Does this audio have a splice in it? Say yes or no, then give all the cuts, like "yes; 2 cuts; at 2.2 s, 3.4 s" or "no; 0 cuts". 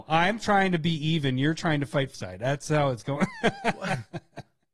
yes; 1 cut; at 2.1 s